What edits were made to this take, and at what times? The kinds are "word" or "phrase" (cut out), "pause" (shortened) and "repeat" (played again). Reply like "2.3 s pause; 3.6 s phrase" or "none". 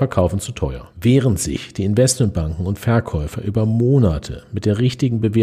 0.9 s pause